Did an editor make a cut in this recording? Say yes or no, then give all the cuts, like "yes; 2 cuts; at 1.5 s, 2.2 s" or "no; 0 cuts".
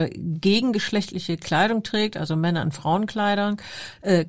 no; 0 cuts